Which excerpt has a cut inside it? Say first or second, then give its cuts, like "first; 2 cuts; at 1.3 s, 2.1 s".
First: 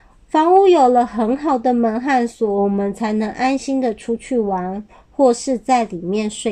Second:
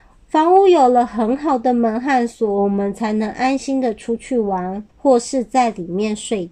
second; 1 cut; at 4.9 s